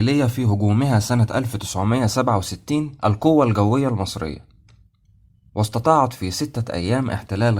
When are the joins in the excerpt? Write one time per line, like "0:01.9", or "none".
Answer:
0:03.0